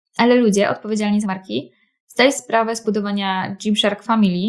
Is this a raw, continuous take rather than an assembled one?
no; 3 cuts; at 1.2 s, 2.3 s, 2.8 s

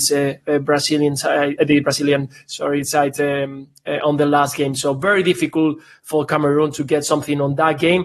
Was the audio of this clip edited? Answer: no; 0 cuts

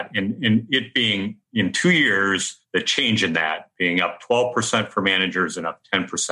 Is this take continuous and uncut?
yes; 0 cuts

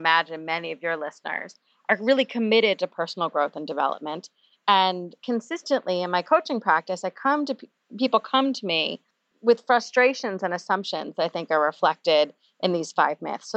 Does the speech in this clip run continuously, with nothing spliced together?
no; 1 cut; at 5.2 s

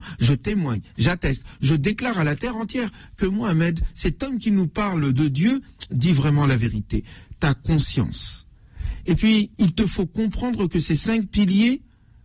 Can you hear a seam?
yes; 1 cut; at 9.5 s

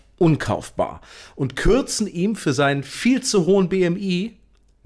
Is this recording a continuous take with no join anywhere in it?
yes; 0 cuts

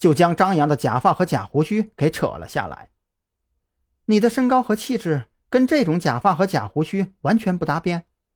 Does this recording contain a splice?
no; 0 cuts

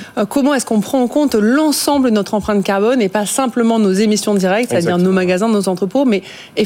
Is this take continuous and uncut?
yes; 0 cuts

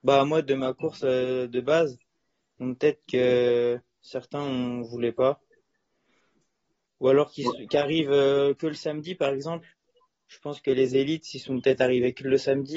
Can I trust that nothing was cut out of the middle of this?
yes; 0 cuts

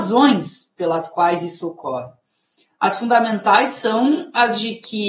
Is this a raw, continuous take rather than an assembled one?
yes; 0 cuts

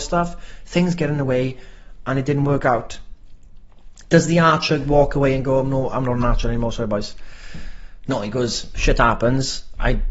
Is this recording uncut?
yes; 0 cuts

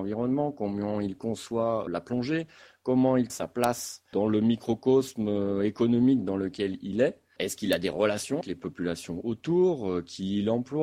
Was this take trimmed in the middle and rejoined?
yes; 3 cuts; at 1.9 s, 3.3 s, 8.4 s

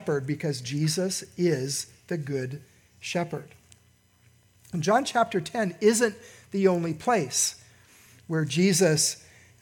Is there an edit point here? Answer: no; 0 cuts

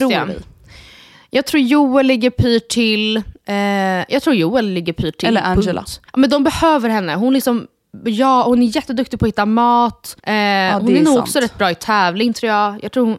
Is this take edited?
yes; 2 cuts; at 6.1 s, 10.2 s

